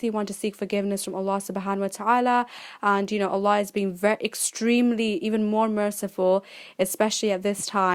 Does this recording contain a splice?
no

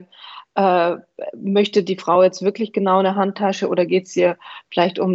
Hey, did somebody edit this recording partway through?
no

